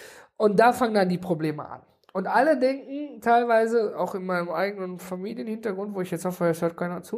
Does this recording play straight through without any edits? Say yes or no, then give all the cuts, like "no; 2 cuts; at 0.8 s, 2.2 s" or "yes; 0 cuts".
yes; 0 cuts